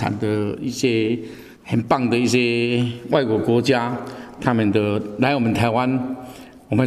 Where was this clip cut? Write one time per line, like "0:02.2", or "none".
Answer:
0:01.5